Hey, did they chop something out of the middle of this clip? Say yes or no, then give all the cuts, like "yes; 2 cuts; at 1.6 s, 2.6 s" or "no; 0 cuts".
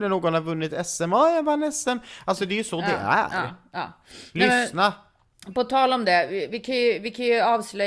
no; 0 cuts